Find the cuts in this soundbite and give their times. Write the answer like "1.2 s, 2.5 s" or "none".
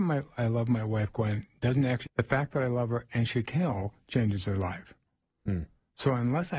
2.1 s, 3.4 s